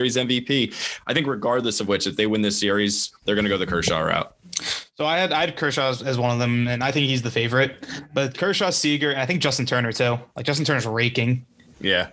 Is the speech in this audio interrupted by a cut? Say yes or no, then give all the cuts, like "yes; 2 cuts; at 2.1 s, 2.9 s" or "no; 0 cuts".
yes; 2 cuts; at 3.2 s, 10.3 s